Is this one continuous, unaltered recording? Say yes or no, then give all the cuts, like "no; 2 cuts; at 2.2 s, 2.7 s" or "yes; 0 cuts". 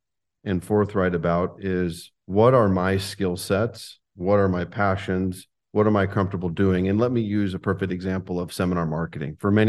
no; 1 cut; at 2.2 s